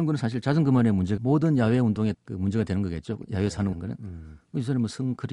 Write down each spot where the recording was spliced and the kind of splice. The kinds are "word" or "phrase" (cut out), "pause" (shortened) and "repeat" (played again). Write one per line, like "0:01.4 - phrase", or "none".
0:01.2 - word
0:02.1 - word
0:03.7 - word